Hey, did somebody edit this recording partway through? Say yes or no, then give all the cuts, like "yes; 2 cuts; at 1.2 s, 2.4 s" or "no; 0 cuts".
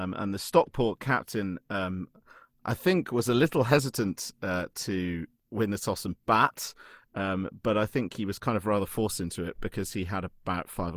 no; 0 cuts